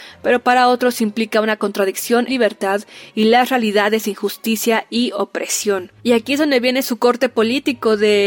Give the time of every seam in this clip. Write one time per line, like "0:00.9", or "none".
0:02.3
0:06.0